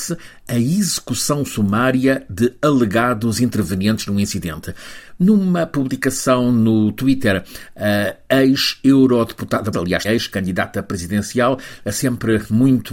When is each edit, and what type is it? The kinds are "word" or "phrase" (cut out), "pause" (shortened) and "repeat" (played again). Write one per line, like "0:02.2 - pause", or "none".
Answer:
0:09.7 - word
0:10.0 - word